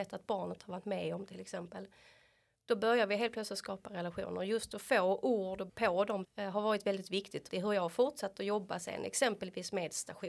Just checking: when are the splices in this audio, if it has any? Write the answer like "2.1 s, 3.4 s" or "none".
5.7 s, 6.2 s, 7.5 s